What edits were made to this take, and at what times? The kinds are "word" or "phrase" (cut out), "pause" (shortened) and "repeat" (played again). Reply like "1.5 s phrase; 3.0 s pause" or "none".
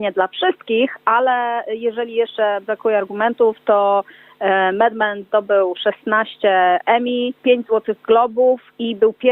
7.4 s pause